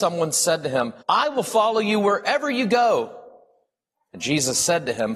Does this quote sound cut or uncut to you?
cut